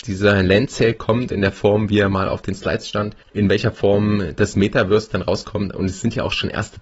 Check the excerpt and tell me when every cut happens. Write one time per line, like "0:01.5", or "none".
none